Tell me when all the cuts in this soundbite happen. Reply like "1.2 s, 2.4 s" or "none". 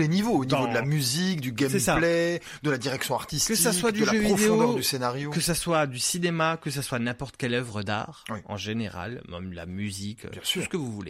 none